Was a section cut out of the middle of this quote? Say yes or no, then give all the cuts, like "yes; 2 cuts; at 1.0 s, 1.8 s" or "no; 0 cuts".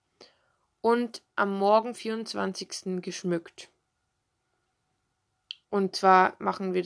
yes; 3 cuts; at 1.3 s, 1.9 s, 5.6 s